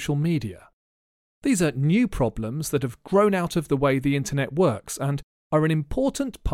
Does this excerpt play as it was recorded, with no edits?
yes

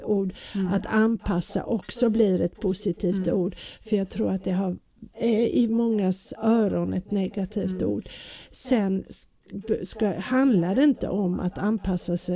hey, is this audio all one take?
yes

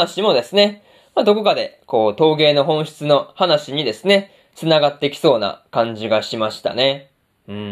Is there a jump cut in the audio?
no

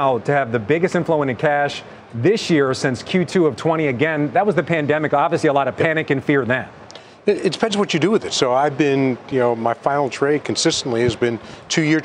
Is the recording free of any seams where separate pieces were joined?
yes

